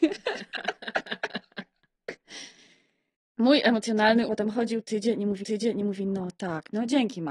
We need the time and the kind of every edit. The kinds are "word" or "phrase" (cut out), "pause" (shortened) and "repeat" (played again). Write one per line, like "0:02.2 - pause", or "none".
0:04.3 - word
0:05.4 - repeat